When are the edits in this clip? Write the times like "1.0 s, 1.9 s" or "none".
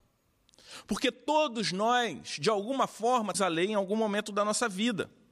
3.3 s